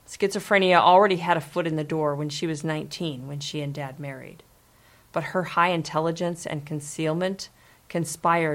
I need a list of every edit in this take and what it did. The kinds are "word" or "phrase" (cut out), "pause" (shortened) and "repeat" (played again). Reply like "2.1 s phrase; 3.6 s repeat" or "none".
none

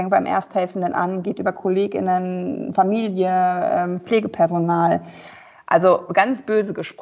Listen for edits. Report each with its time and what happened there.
none

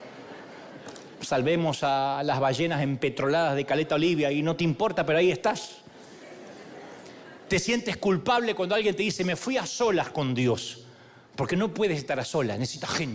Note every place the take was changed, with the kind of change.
none

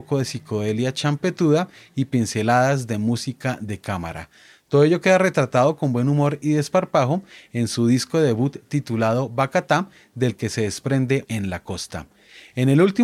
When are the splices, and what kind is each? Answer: 11.2 s word

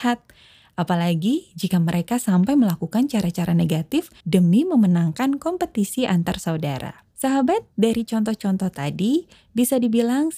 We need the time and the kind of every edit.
4.2 s pause; 7.1 s pause

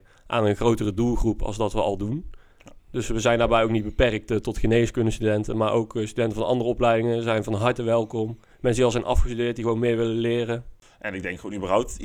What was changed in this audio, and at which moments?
2.8 s pause

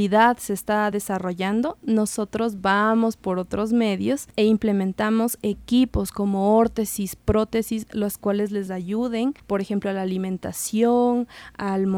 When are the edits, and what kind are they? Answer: none

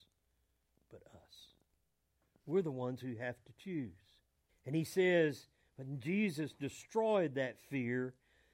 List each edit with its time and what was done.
4.5 s pause

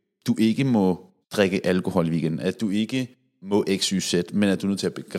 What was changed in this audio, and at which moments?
1.2 s pause

